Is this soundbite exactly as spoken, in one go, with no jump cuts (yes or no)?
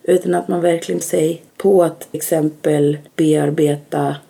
no